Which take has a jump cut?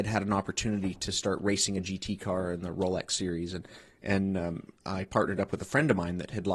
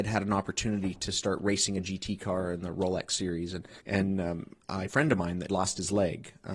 second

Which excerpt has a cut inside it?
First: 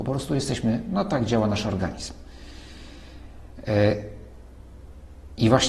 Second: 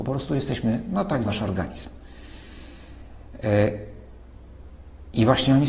second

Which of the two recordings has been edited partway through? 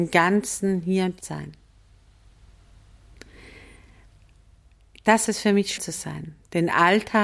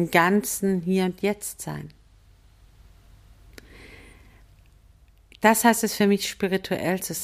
first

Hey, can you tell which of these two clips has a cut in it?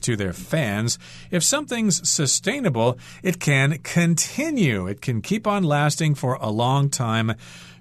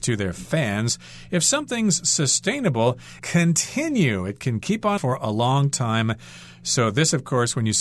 second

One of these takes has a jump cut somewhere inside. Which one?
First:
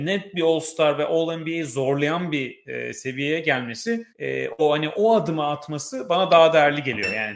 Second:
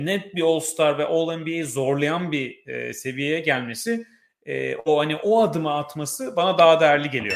first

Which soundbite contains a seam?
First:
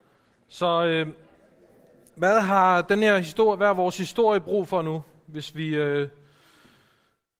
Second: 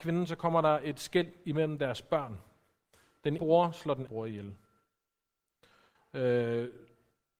second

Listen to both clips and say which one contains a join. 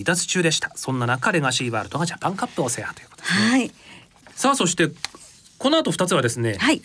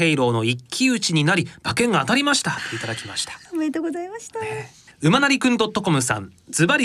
second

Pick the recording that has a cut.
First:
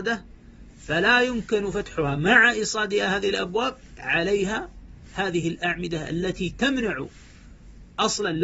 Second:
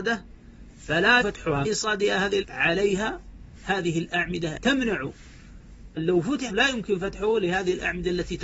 second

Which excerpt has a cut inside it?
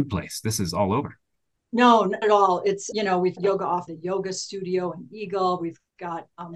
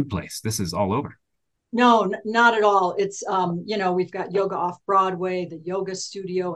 first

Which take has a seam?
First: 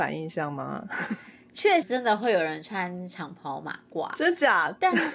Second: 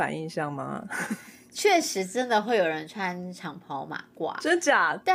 first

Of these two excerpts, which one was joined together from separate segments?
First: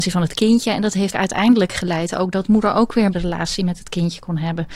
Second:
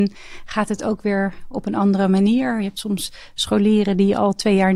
first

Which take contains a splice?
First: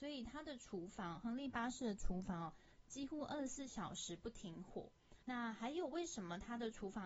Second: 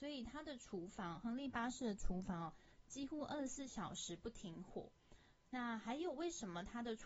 first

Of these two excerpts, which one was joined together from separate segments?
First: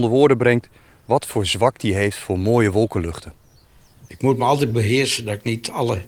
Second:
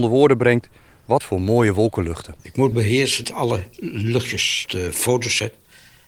second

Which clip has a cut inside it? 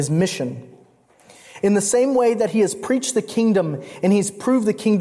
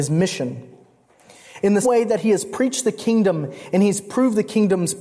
second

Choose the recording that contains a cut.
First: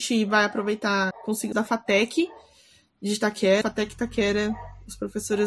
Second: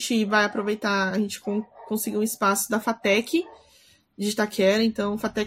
first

